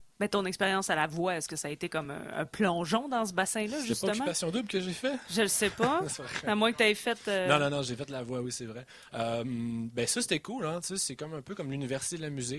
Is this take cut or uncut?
uncut